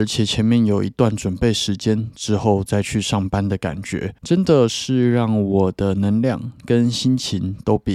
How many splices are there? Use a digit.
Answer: 1